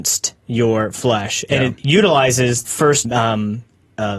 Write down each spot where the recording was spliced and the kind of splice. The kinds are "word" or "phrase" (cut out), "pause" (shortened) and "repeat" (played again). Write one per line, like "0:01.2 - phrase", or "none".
0:02.6 - word
0:03.0 - word